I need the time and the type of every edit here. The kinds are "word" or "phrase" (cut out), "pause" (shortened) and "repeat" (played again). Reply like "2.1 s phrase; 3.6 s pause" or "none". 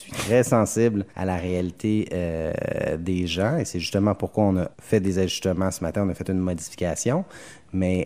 1.1 s pause; 4.7 s pause